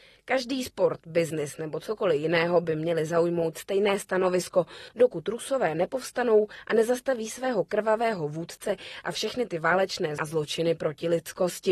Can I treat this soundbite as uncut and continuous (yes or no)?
no